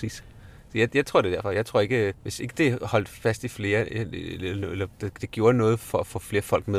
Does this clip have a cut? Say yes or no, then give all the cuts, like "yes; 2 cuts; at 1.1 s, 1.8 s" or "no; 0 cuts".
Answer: yes; 1 cut; at 2.2 s